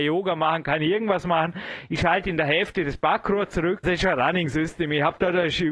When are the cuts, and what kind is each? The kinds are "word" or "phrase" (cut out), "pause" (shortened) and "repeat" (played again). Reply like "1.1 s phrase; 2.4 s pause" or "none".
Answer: 3.8 s word